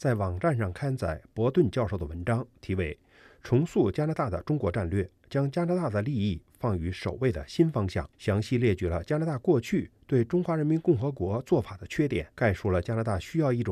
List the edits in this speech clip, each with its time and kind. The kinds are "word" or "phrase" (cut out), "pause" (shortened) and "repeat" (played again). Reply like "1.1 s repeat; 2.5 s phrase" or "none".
5.2 s pause; 8.1 s pause; 12.3 s pause